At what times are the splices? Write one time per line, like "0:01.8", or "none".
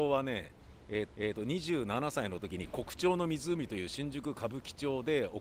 0:01.1